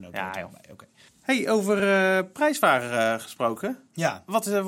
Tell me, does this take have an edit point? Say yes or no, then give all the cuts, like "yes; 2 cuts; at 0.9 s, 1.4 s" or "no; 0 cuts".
no; 0 cuts